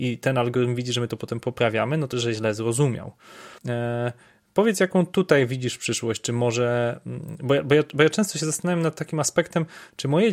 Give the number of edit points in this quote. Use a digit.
2